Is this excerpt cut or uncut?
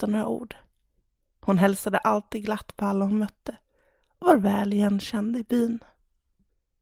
uncut